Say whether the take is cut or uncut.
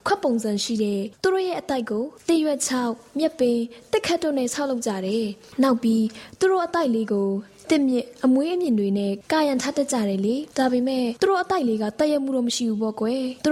cut